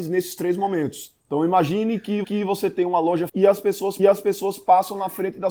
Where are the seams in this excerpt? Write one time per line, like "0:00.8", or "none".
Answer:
0:01.2
0:02.2
0:03.3
0:04.0